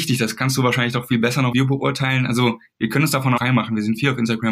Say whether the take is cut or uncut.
cut